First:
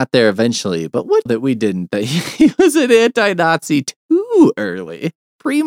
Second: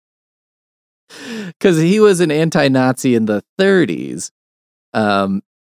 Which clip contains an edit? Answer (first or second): first